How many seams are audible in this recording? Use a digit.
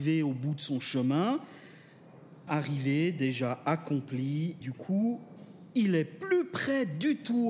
2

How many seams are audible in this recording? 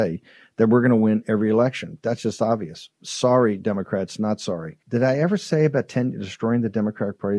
1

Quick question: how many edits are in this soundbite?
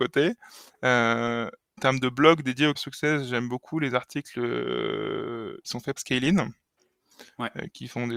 4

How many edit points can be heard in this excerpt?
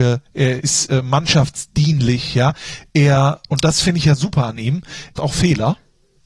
1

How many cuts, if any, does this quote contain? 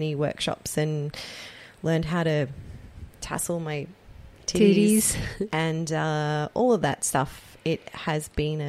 0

